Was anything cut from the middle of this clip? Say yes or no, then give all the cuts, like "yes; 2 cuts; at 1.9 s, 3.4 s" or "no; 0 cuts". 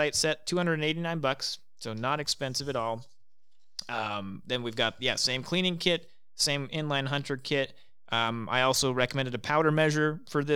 no; 0 cuts